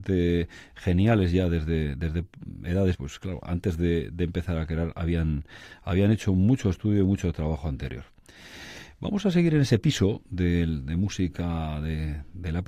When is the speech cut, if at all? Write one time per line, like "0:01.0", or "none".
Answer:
0:02.9